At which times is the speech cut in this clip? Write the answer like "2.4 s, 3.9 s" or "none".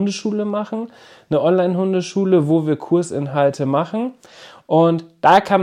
none